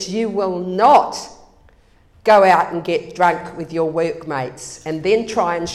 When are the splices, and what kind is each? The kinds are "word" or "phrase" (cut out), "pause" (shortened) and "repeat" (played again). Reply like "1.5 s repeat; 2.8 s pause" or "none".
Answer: none